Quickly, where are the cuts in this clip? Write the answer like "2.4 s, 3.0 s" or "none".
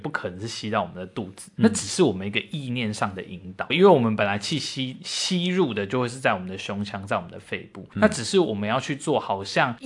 3.7 s